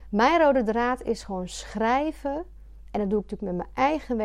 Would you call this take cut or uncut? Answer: uncut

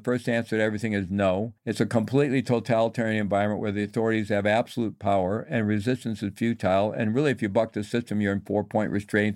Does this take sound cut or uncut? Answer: cut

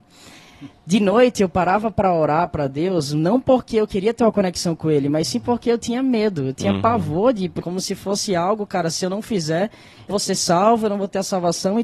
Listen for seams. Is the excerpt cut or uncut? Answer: cut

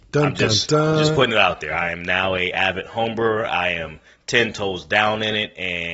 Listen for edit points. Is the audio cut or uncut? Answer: uncut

